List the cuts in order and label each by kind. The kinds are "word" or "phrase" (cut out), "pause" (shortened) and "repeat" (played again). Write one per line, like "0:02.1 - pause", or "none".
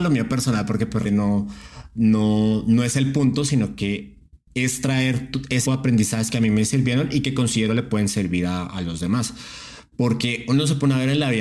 0:01.0 - word
0:05.6 - word